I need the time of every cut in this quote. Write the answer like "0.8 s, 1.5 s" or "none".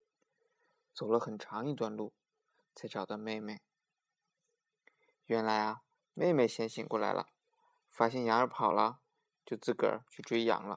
none